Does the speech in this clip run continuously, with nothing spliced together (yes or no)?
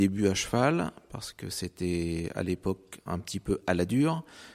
yes